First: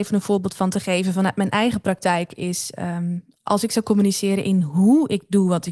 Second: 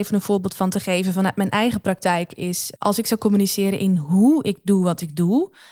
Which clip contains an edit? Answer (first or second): second